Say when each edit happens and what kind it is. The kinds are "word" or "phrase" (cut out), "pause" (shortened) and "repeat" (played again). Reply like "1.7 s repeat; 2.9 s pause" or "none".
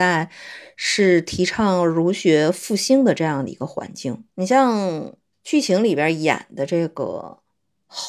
4.3 s pause; 5.2 s pause